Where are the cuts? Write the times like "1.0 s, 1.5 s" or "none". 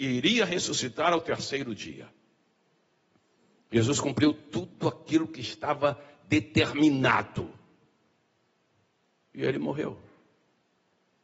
none